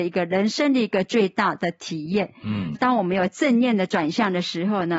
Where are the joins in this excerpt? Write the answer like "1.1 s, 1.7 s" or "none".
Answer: 2.7 s